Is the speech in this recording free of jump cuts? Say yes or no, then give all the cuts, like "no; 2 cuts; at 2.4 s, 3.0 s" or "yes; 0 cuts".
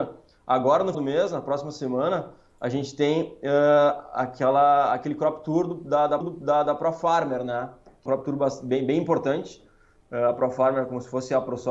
no; 3 cuts; at 0.9 s, 6.2 s, 8.1 s